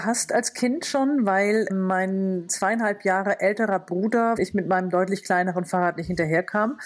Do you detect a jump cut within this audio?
yes; 2 cuts; at 1.7 s, 4.4 s

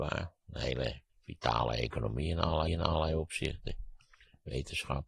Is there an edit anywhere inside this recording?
yes; 2 cuts; at 1.1 s, 2.7 s

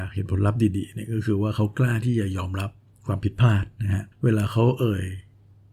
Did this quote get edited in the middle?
yes; 1 cut; at 4.1 s

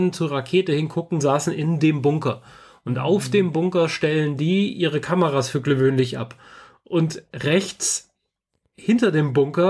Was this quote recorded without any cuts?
yes; 0 cuts

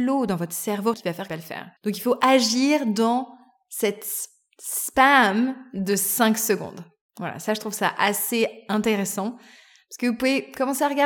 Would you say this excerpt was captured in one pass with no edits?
no; 3 cuts; at 0.9 s, 1.3 s, 1.8 s

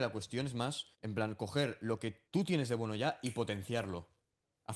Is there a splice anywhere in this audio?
yes; 2 cuts; at 0.9 s, 2.3 s

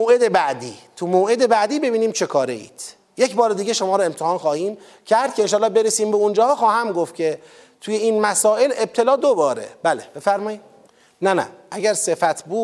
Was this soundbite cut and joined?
no; 0 cuts

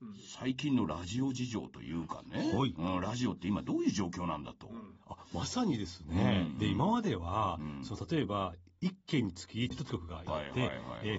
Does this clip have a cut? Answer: yes; 1 cut; at 9.9 s

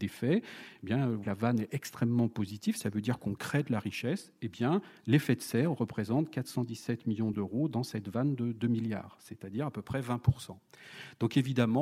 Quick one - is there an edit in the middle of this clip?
no; 0 cuts

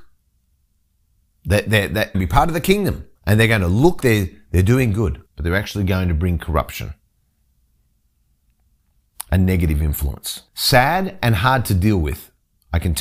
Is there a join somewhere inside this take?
yes; 5 cuts; at 2.1 s, 3.2 s, 4.0 s, 5.3 s, 10.5 s

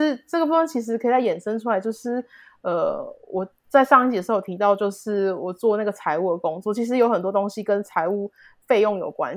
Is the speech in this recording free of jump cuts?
yes; 0 cuts

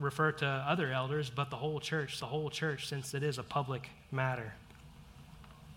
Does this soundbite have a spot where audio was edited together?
yes; 1 cut; at 2.2 s

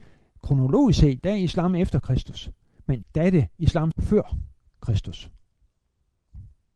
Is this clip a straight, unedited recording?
no; 3 cuts; at 1.2 s, 3.0 s, 3.9 s

